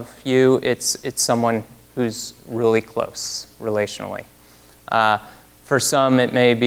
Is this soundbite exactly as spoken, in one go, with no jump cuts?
yes; 0 cuts

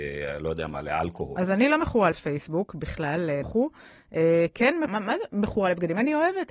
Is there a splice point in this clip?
yes; 3 cuts; at 2.1 s, 3.4 s, 4.9 s

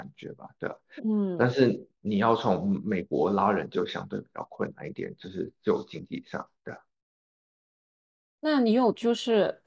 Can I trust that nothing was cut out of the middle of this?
yes; 0 cuts

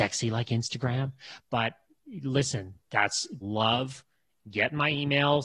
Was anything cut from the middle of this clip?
yes; 1 cut; at 3.4 s

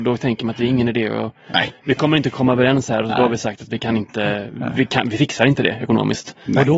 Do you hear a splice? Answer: no; 0 cuts

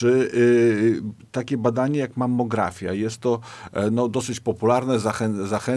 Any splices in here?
no; 0 cuts

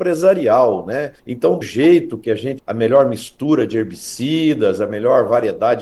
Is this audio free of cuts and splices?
no; 3 cuts; at 1.2 s, 1.6 s, 2.6 s

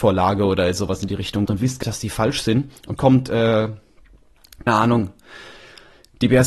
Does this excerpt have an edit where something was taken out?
yes; 4 cuts; at 1.5 s, 1.8 s, 3.0 s, 4.7 s

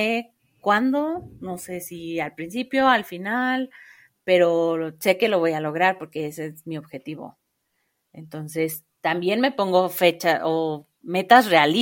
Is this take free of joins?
yes; 0 cuts

